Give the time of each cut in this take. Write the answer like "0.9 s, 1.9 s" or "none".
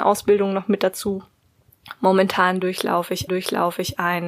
3.3 s